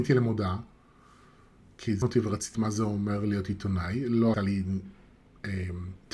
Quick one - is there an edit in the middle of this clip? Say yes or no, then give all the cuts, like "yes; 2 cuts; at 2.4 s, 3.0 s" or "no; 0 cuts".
yes; 3 cuts; at 2.0 s, 2.5 s, 4.3 s